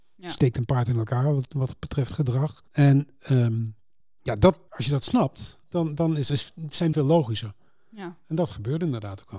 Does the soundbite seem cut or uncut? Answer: cut